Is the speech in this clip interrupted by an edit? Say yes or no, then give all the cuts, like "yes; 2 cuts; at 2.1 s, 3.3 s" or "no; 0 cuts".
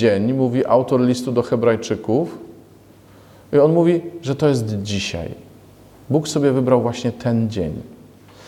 no; 0 cuts